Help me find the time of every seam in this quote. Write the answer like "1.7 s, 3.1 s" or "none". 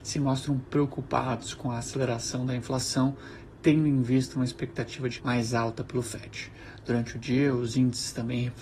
5.2 s